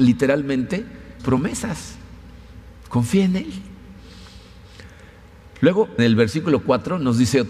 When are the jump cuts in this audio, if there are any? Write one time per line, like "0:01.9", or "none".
0:01.2
0:06.0